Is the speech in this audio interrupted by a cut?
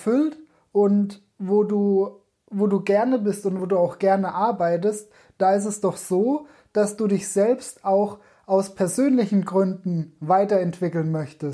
no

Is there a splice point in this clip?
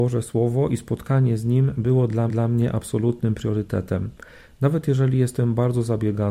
yes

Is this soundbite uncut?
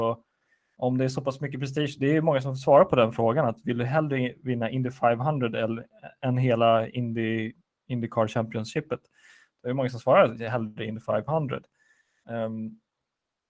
yes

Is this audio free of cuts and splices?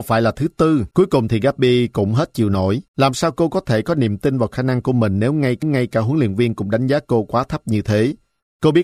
no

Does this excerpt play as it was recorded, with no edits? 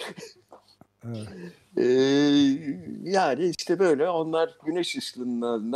yes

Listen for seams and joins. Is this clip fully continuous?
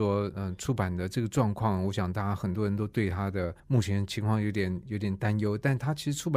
no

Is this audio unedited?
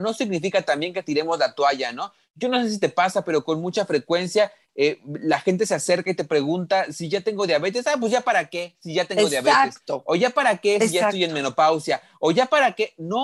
yes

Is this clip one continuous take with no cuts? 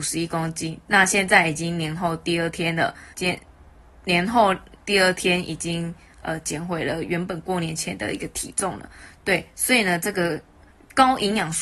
no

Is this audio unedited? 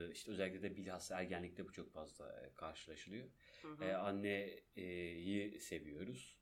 yes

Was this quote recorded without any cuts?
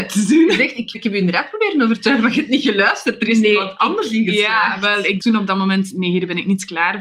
no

